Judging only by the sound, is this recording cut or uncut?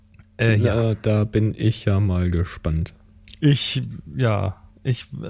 uncut